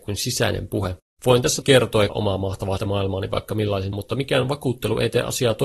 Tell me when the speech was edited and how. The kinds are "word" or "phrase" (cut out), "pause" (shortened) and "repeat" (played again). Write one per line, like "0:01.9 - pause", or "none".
0:01.6 - word
0:02.1 - word
0:02.8 - word
0:03.9 - word